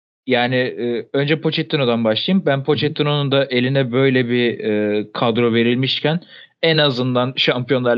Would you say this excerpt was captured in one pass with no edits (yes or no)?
yes